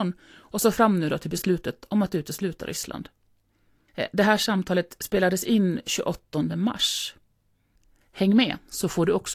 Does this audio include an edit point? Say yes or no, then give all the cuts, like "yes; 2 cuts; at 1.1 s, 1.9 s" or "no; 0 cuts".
no; 0 cuts